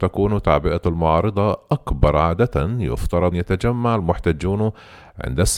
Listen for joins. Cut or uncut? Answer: cut